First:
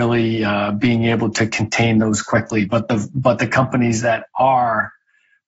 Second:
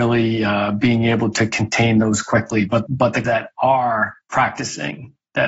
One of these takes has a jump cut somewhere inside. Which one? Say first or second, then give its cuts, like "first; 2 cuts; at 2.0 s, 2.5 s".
second; 3 cuts; at 2.9 s, 3.2 s, 4.2 s